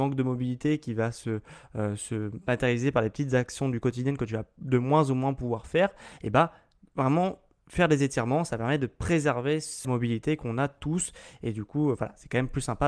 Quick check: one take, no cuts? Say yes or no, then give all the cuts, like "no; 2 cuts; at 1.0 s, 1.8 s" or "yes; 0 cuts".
no; 1 cut; at 9.8 s